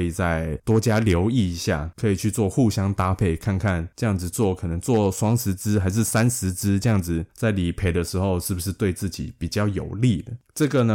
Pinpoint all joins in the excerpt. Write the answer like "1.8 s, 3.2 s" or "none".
7.3 s